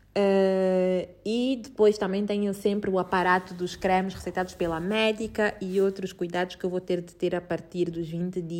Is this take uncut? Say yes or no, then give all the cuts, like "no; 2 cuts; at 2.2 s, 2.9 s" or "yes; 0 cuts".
yes; 0 cuts